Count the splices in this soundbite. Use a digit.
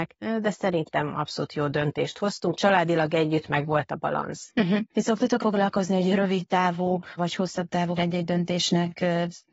4